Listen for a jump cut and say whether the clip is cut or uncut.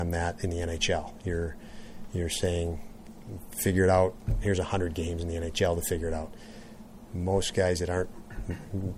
uncut